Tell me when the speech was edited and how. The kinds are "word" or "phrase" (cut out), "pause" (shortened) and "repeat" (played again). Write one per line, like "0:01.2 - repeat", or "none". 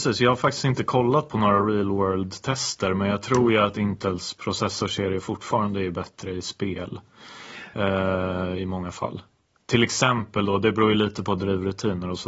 none